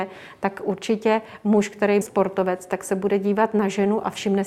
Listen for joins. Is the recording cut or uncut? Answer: cut